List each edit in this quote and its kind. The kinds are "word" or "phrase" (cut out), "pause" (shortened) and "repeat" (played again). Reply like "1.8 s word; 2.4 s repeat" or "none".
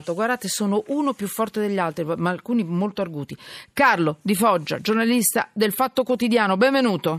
none